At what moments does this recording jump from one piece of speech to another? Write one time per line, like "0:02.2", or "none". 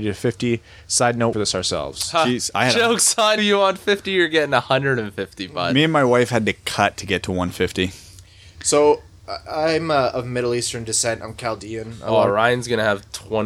0:01.3
0:03.4